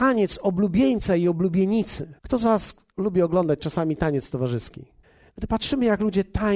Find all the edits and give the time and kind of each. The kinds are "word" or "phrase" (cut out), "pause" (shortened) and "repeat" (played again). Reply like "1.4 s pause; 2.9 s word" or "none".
2.2 s pause; 5.0 s pause